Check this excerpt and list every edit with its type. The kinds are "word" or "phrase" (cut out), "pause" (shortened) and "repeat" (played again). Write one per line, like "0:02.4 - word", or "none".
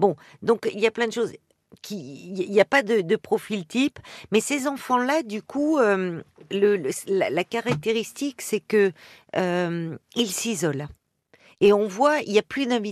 none